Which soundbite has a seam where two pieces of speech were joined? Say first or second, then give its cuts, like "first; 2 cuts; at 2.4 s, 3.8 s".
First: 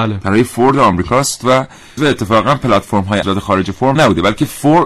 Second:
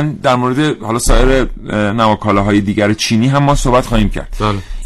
first; 3 cuts; at 2.0 s, 3.2 s, 4.0 s